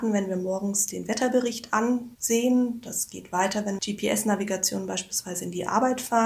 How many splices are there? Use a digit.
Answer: 1